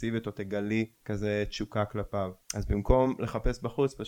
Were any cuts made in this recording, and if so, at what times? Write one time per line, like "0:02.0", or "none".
0:01.0
0:02.4